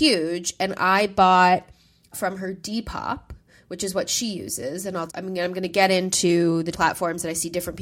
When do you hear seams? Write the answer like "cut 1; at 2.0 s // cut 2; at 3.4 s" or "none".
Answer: cut 1; at 2.1 s // cut 2; at 5.1 s // cut 3; at 6.7 s